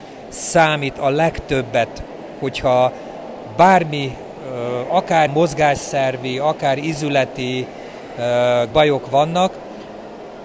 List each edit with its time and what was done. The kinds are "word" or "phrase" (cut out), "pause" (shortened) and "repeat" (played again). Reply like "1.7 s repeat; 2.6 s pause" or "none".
5.3 s word; 8.7 s word